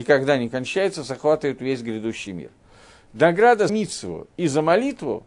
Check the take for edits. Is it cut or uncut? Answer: cut